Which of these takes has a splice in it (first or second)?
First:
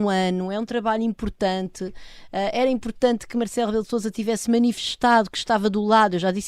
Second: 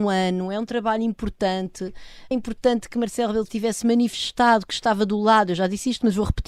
second